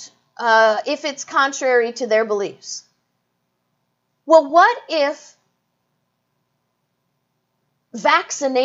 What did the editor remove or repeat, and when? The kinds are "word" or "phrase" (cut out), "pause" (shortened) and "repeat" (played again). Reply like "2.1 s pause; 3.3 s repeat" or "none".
none